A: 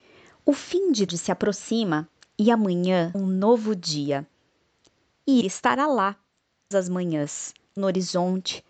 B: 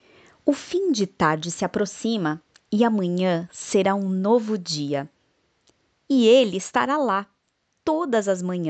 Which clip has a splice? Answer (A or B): A